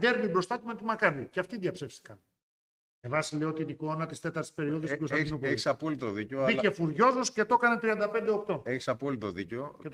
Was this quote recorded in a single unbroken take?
yes; 0 cuts

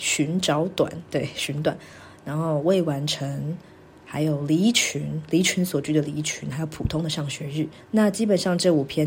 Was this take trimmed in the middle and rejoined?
yes; 1 cut; at 7.8 s

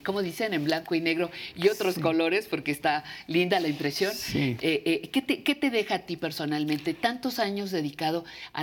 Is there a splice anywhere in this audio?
no; 0 cuts

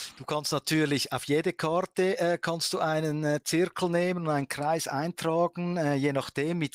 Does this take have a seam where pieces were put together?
no; 0 cuts

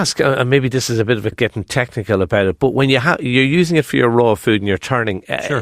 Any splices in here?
yes; 2 cuts; at 1.3 s, 1.6 s

